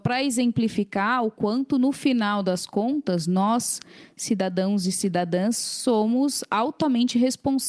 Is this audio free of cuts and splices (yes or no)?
yes